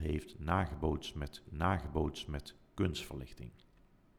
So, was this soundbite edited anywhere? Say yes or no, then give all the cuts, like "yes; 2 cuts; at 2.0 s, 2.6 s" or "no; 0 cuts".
yes; 1 cut; at 1.5 s